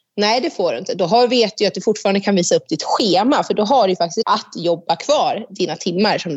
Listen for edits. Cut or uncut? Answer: cut